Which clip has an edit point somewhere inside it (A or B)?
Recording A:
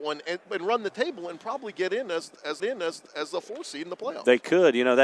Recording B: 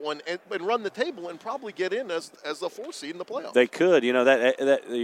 A